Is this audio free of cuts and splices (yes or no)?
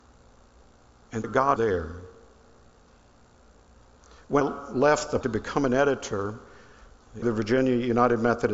no